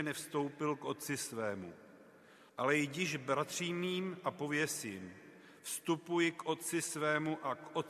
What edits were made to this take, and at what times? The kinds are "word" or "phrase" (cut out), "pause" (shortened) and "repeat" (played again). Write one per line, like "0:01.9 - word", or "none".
0:02.5 - pause

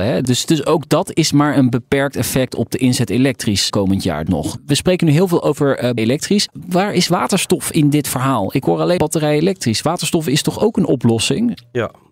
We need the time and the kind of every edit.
0:03.7 - word
0:04.3 - word
0:06.0 - word
0:09.0 - word

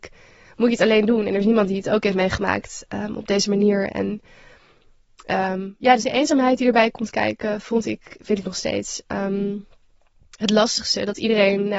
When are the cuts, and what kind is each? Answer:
0:06.0 - word

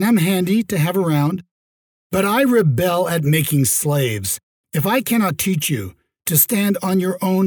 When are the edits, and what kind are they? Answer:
none

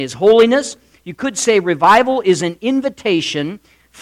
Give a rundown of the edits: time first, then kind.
none

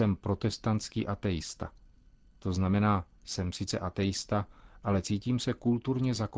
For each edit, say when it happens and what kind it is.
none

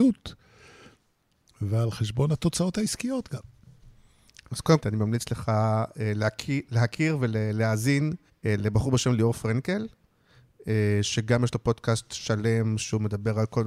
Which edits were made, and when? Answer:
0:04.8 - phrase
0:08.3 - pause

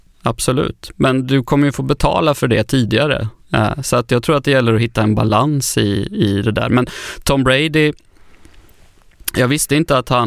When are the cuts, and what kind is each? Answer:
none

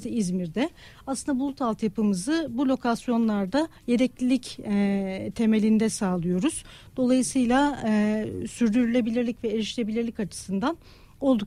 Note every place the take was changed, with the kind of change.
0:03.8 - pause

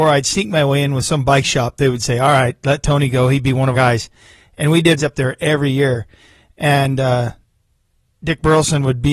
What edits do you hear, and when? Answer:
0:03.7 - word
0:05.0 - word

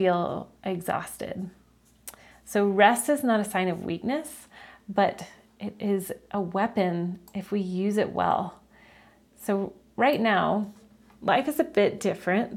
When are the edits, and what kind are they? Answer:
none

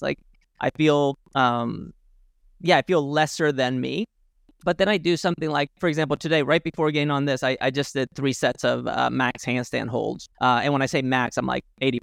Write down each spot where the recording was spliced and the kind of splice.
0:04.3 - pause
0:10.3 - pause

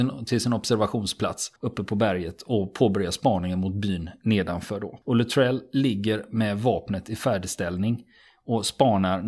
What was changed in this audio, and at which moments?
0:01.6 - pause
0:05.0 - pause

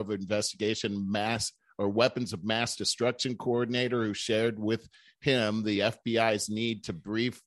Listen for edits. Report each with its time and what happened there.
none

